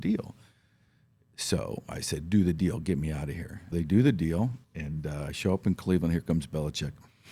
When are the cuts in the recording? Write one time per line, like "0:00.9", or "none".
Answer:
0:03.7
0:04.6